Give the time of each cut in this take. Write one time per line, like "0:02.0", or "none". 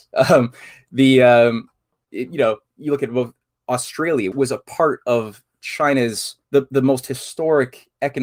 0:04.3
0:06.4